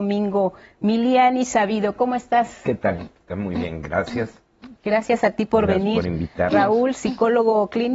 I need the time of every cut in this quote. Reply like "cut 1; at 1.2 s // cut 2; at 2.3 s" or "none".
cut 1; at 4.8 s